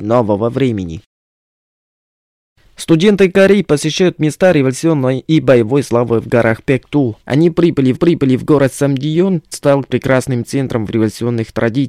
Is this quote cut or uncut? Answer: cut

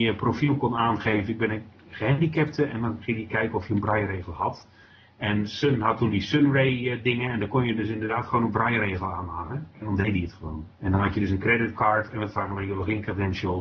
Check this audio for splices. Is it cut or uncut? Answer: cut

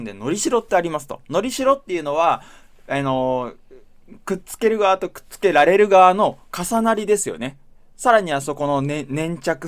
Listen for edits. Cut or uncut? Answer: uncut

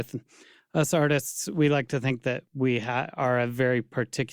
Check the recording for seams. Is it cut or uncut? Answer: uncut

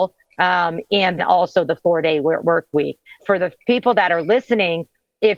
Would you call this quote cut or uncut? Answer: cut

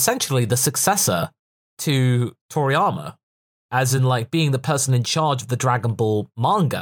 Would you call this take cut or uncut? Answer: uncut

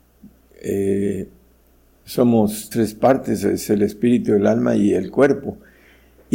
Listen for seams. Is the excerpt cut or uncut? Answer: cut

